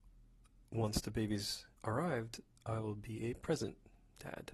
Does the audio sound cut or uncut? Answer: cut